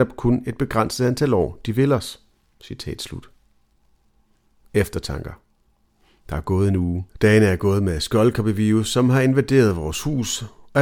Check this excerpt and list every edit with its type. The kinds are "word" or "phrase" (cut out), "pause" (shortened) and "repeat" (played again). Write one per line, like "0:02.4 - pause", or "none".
none